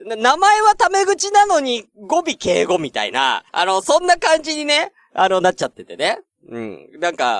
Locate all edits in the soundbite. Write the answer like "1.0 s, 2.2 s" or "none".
3.5 s